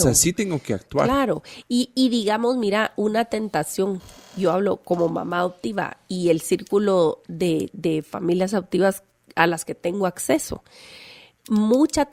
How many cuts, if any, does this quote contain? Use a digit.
0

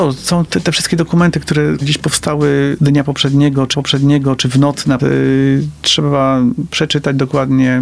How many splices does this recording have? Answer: 4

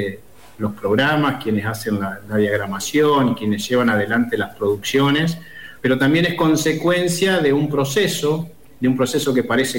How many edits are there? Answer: 1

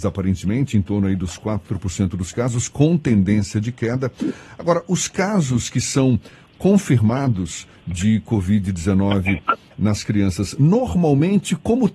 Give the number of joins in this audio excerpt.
1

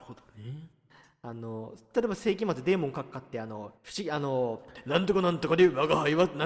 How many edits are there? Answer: 1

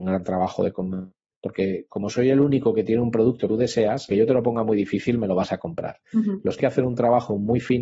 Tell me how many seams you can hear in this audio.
5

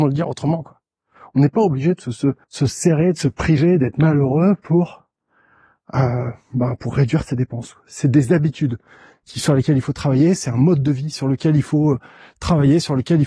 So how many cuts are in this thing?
1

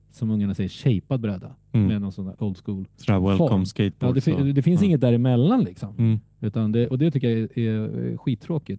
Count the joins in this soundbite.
2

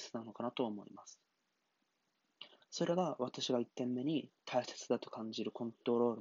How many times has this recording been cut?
1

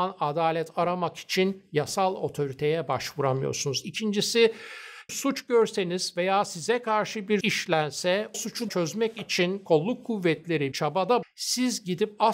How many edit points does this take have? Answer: 6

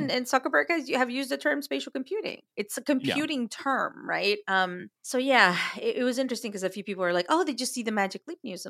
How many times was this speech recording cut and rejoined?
2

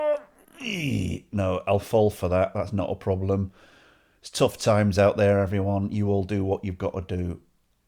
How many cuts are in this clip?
0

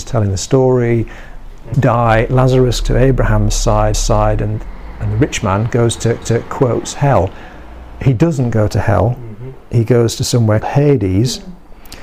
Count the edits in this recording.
5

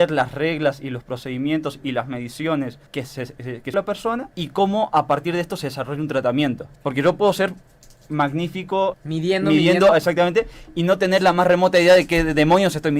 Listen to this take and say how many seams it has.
5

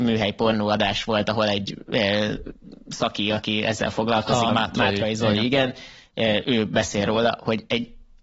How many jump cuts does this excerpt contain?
1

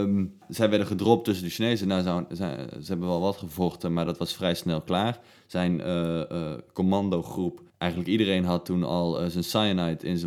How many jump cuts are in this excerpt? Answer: 0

